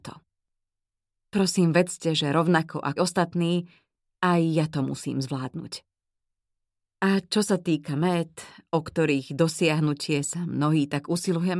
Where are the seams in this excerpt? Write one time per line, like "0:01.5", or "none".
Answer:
0:03.0